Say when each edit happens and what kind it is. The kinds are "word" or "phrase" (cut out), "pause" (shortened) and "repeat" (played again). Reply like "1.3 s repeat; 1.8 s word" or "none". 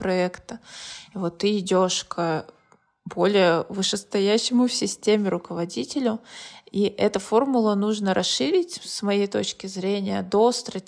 none